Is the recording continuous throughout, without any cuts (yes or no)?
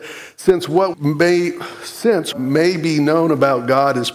no